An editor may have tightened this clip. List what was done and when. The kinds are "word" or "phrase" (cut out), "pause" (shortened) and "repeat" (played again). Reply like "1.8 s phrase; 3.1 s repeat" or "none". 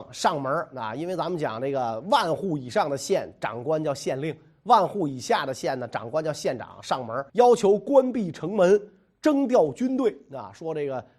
7.3 s pause